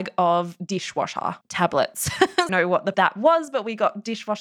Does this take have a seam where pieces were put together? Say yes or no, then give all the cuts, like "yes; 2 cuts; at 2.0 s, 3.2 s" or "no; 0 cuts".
yes; 3 cuts; at 1.4 s, 2.5 s, 2.9 s